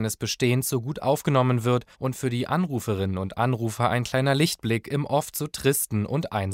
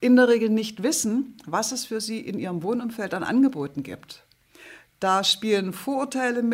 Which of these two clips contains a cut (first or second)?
first